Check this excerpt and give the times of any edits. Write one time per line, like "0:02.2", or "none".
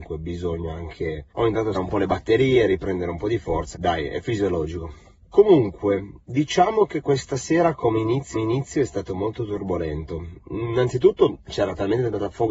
0:01.3
0:01.7
0:03.7
0:05.2
0:08.3